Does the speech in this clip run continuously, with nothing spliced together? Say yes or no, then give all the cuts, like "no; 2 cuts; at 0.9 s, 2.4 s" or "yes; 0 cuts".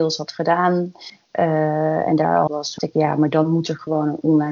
no; 2 cuts; at 2.5 s, 2.8 s